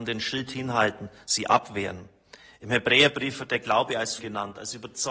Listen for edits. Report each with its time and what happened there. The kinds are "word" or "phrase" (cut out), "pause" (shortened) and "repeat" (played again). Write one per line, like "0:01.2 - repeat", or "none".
0:04.2 - word